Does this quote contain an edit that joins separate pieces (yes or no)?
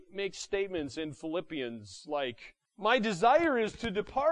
yes